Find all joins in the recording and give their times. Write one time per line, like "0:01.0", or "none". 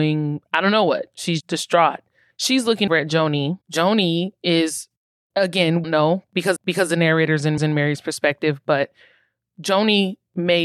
0:01.4
0:02.9
0:03.6
0:05.8
0:06.6
0:07.6

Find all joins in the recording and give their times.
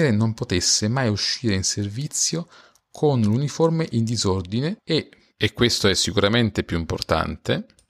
none

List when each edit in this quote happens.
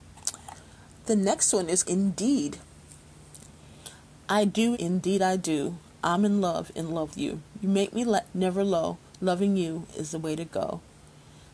0:01.8
0:04.7
0:07.1
0:08.3
0:09.1

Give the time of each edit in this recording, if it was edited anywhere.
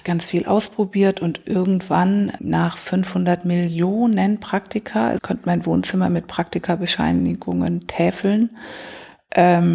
0:02.4
0:05.2

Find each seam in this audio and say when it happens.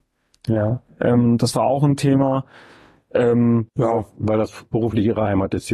0:03.7

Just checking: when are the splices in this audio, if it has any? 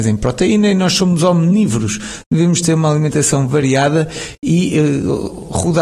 none

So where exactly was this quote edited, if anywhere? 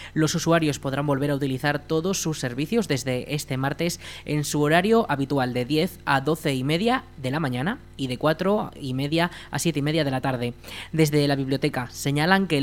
none

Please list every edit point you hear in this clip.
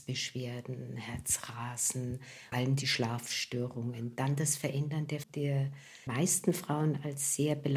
0:02.5
0:05.2
0:06.1

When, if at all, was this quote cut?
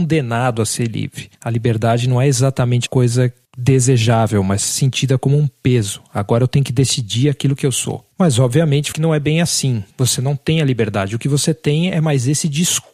0:01.3
0:02.9
0:08.1
0:08.9
0:09.9

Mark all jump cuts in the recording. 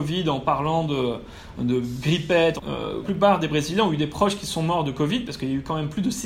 0:03.0

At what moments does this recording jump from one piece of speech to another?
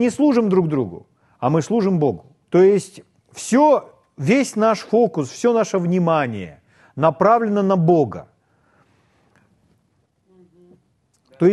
0:02.4

